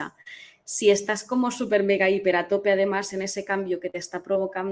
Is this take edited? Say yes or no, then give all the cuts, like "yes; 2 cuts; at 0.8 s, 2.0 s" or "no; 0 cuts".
no; 0 cuts